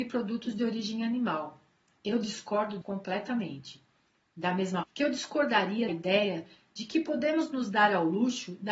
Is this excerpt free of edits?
no; 3 cuts; at 2.8 s, 4.8 s, 5.9 s

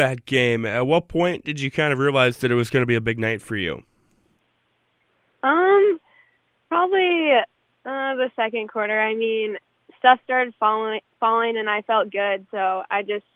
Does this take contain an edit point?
no; 0 cuts

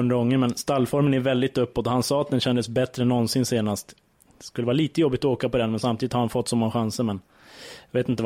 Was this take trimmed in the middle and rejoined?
no; 0 cuts

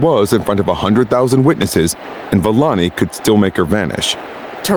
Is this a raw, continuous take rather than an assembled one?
yes; 0 cuts

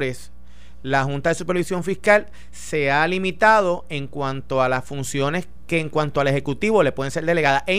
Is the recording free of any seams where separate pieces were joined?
yes; 0 cuts

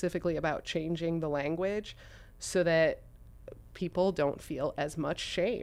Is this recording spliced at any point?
no; 0 cuts

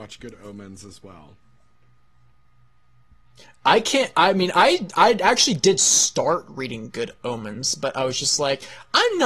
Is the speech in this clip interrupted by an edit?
no; 0 cuts

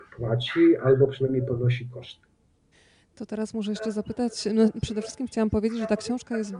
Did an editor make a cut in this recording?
yes; 1 cut; at 2.7 s

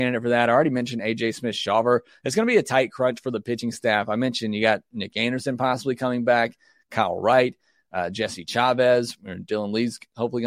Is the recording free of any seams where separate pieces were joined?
yes; 0 cuts

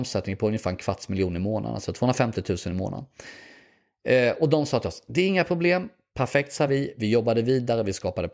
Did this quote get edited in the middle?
no; 0 cuts

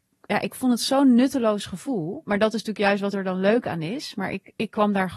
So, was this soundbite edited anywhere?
no; 0 cuts

